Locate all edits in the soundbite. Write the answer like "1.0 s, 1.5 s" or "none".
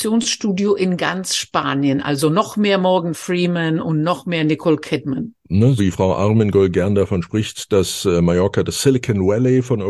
5.8 s

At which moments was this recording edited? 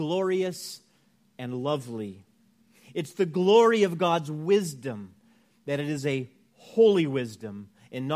none

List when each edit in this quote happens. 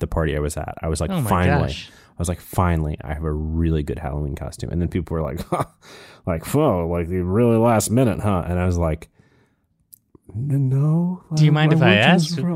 none

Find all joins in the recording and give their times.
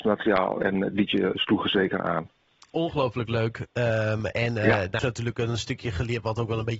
5.0 s

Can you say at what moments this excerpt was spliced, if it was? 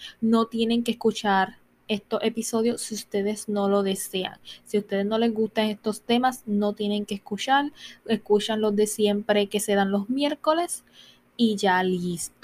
none

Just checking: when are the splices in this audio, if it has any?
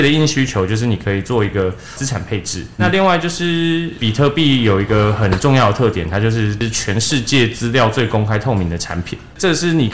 2.8 s

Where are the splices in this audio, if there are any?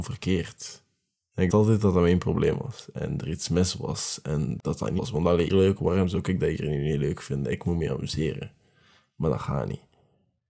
1.5 s, 4.6 s, 5.0 s, 5.5 s

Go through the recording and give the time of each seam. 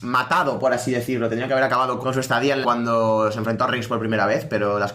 2.0 s, 2.6 s, 3.7 s

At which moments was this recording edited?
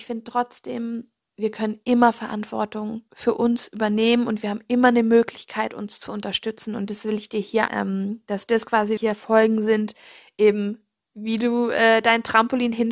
1.2 s, 3.1 s, 7.7 s, 9.0 s

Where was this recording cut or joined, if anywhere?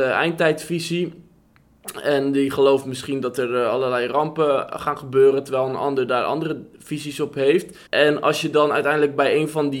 7.9 s

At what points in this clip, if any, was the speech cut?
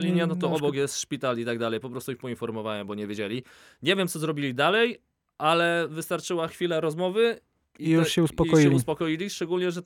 none

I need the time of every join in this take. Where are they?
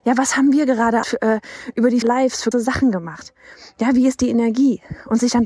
1.0 s, 2.0 s, 2.5 s

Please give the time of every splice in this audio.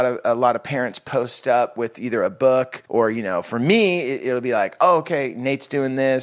2.9 s

